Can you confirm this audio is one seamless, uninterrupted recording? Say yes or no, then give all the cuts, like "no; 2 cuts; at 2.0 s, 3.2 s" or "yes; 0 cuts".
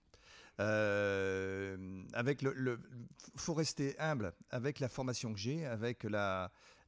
yes; 0 cuts